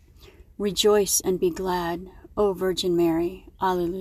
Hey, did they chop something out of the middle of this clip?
no; 0 cuts

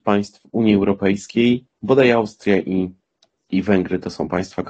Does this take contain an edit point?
no; 0 cuts

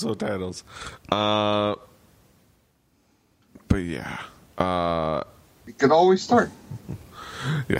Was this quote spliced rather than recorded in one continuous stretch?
no; 0 cuts

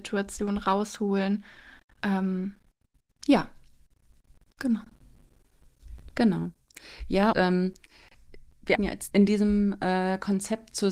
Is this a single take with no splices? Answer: no; 3 cuts; at 7.3 s, 8.8 s, 9.1 s

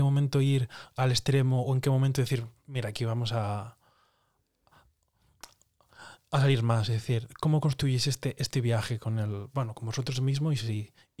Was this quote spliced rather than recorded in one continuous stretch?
no; 0 cuts

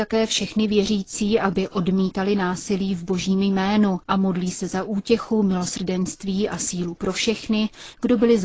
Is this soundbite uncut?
yes; 0 cuts

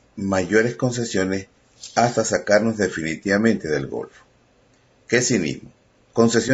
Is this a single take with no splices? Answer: yes; 0 cuts

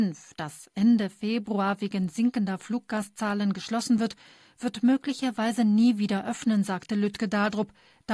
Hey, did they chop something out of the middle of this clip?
no; 0 cuts

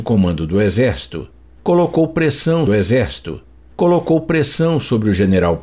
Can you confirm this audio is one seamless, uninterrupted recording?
no; 1 cut; at 2.7 s

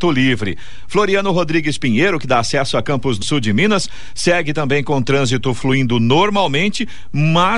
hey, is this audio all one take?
no; 1 cut; at 3.2 s

